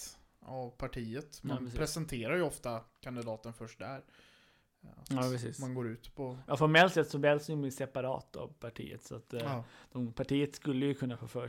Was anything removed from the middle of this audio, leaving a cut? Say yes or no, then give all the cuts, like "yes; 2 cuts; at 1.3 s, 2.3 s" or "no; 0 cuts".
no; 0 cuts